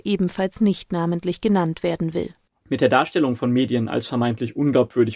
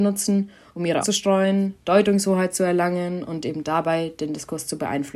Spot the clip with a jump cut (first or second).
second